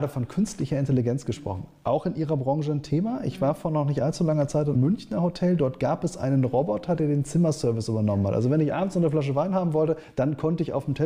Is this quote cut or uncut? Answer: cut